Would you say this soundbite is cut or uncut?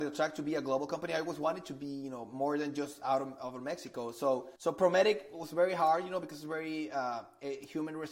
cut